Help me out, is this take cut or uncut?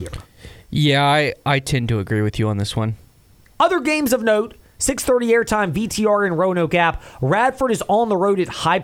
uncut